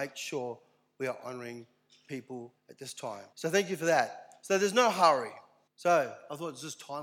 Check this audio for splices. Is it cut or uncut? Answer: cut